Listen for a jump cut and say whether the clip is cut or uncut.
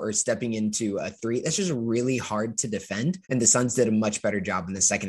cut